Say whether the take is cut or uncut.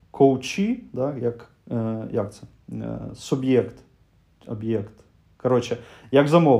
uncut